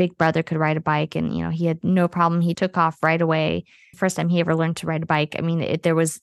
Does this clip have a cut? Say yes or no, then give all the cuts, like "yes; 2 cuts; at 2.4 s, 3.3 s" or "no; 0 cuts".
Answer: yes; 2 cuts; at 2.5 s, 3.9 s